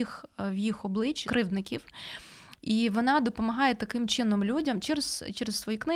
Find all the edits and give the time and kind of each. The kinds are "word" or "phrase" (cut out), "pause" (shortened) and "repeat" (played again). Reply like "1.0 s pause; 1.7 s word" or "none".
1.2 s word

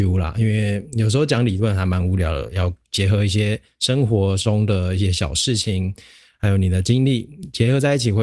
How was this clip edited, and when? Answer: none

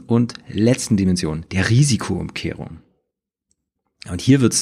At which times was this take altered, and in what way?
1.5 s pause

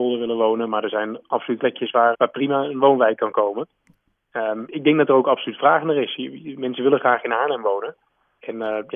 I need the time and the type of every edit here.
1.6 s word; 2.1 s word; 4.7 s word

